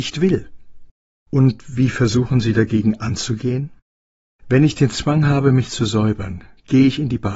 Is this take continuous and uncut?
yes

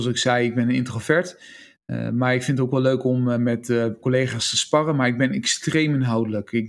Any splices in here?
no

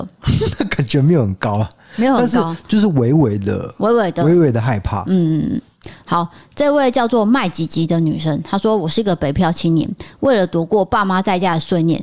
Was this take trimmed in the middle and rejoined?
no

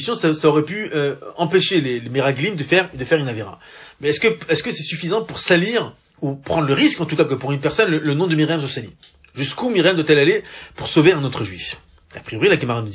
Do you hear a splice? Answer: no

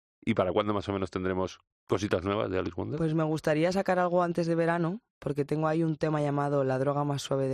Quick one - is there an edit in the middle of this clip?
no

